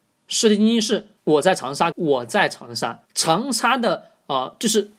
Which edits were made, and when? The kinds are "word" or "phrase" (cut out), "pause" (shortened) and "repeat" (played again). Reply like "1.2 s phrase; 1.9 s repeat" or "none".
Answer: 1.2 s pause; 1.9 s phrase; 3.1 s pause